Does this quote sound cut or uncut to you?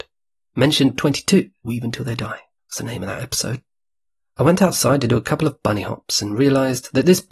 cut